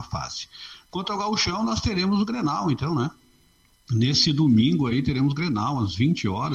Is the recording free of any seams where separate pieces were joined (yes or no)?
yes